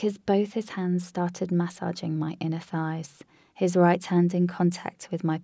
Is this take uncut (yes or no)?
yes